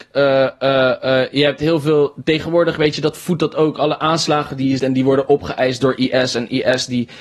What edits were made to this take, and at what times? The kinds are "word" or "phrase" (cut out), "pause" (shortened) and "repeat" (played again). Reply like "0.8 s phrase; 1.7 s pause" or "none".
4.8 s word